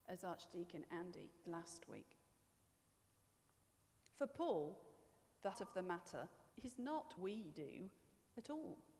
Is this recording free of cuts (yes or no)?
no